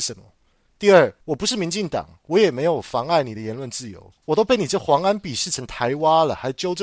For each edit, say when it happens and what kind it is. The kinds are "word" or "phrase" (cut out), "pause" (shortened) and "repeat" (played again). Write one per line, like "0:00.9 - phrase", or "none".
0:01.2 - pause
0:04.2 - pause